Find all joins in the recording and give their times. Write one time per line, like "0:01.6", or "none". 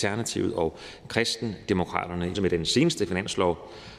0:02.3